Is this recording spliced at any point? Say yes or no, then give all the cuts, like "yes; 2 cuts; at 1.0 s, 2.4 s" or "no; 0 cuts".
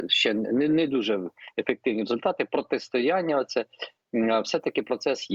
no; 0 cuts